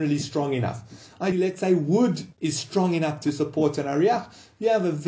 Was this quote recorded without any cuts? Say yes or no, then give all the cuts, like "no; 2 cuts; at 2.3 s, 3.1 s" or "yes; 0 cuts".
no; 2 cuts; at 1.3 s, 2.3 s